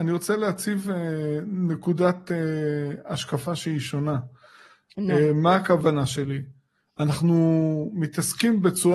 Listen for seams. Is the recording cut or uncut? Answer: uncut